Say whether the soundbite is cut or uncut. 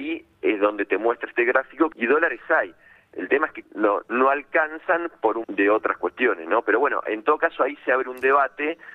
cut